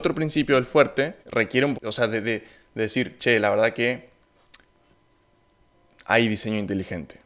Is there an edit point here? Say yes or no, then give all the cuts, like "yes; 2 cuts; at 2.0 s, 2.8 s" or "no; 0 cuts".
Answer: yes; 2 cuts; at 1.2 s, 1.7 s